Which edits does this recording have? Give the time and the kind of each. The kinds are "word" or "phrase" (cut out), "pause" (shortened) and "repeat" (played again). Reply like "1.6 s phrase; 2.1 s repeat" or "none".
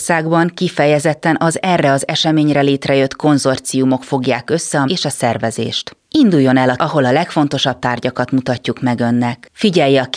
4.9 s word; 6.0 s pause; 6.8 s phrase